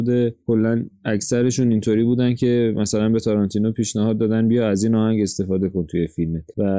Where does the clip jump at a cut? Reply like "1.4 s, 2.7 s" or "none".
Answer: none